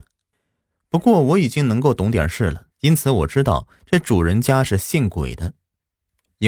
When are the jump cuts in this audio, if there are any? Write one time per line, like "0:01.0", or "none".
0:02.7